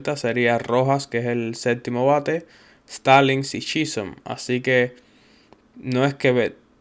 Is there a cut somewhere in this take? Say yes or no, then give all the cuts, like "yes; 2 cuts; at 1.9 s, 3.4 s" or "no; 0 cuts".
no; 0 cuts